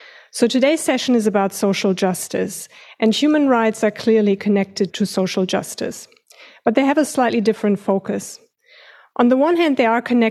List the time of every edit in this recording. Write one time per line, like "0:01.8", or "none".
none